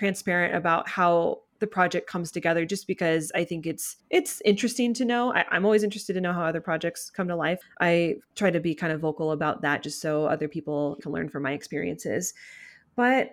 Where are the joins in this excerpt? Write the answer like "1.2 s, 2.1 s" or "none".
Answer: 1.5 s, 4.0 s, 7.6 s, 11.0 s